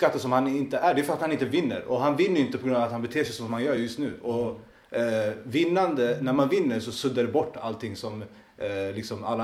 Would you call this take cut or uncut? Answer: uncut